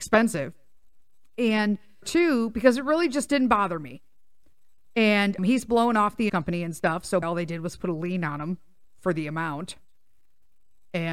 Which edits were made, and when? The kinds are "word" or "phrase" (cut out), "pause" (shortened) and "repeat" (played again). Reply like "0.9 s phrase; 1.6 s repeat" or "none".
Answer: 2.0 s word; 5.4 s word; 6.3 s word; 7.2 s word